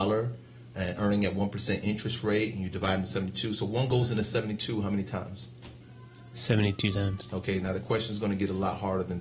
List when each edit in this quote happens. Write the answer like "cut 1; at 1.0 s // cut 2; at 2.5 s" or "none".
none